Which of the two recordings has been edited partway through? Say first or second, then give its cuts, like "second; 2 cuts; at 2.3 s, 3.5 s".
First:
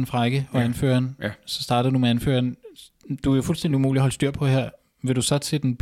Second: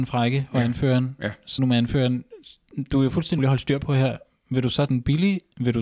second; 3 cuts; at 1.6 s, 3.4 s, 4.9 s